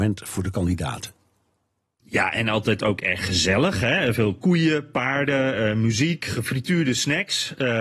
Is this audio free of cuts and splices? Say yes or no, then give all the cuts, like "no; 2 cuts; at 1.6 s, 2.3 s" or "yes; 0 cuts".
yes; 0 cuts